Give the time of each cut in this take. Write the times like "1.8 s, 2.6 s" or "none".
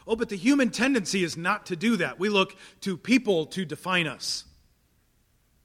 none

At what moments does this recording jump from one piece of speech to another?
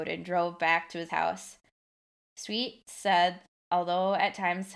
1.1 s

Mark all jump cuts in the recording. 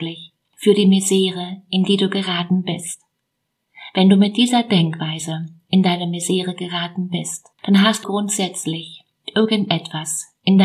7.5 s, 8.0 s

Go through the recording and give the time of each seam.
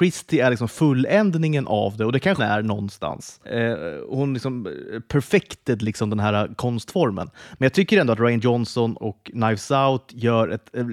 2.4 s, 3.4 s, 9.0 s

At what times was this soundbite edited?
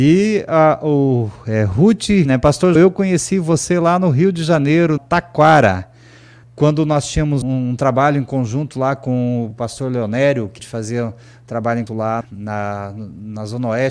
2.3 s, 2.8 s, 5.0 s, 6.4 s, 7.4 s, 9.5 s, 10.6 s, 11.9 s, 12.2 s

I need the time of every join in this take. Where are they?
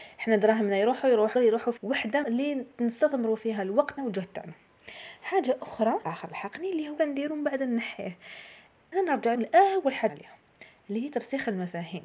1.3 s, 1.8 s, 2.2 s, 4.0 s, 6.0 s, 7.0 s, 8.9 s, 9.4 s, 10.1 s

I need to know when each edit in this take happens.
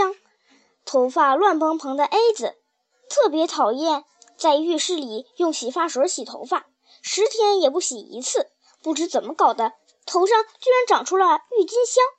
none

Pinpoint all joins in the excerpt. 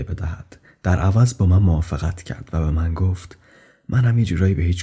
none

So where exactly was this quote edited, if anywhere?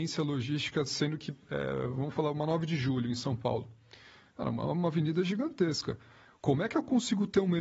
none

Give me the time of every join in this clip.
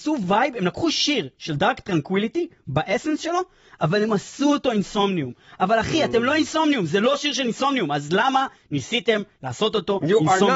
none

